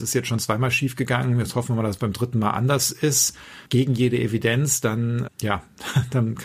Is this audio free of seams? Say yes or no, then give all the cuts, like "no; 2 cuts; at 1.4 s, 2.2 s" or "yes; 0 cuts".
no; 1 cut; at 3.7 s